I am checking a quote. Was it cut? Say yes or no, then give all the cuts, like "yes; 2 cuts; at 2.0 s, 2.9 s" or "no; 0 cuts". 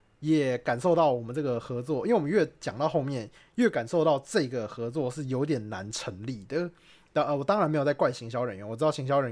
no; 0 cuts